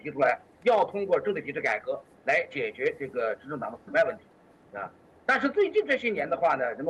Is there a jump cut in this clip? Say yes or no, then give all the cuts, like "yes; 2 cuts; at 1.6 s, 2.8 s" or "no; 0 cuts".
no; 0 cuts